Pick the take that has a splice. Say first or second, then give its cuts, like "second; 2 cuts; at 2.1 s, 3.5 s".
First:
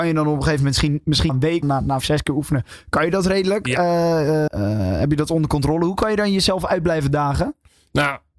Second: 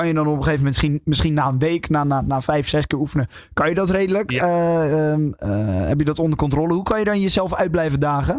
first; 4 cuts; at 1.3 s, 1.6 s, 2.0 s, 4.5 s